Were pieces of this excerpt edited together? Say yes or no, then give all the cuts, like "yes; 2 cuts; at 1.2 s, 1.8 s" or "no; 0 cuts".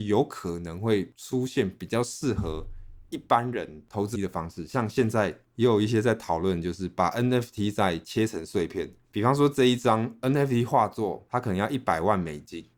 yes; 1 cut; at 4.1 s